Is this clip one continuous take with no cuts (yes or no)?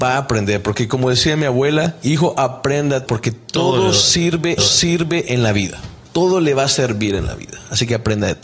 no